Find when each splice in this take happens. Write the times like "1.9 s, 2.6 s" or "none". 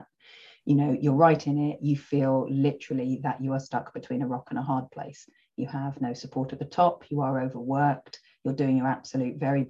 none